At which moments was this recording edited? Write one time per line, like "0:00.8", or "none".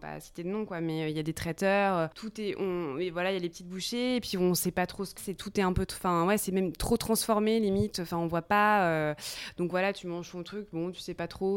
0:05.2